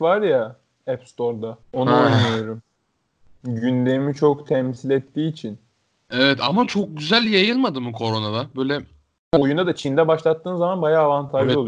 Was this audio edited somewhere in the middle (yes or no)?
yes